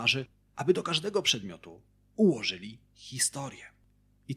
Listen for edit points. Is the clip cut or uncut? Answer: uncut